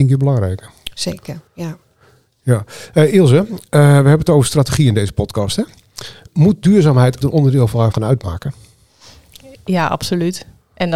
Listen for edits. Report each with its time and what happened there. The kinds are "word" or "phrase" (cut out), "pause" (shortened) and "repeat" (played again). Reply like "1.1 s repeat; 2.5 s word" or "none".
1.5 s pause; 7.2 s word; 7.9 s word